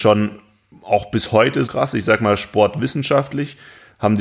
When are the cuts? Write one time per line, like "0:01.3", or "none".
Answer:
0:01.7